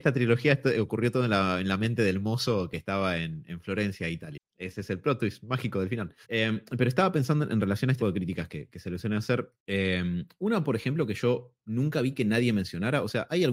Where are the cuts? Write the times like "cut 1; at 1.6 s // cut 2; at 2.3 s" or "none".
cut 1; at 6.2 s // cut 2; at 8.0 s // cut 3; at 9.6 s